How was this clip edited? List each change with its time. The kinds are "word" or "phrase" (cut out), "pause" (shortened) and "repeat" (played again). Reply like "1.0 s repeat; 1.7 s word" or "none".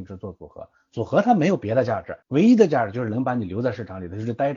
2.2 s pause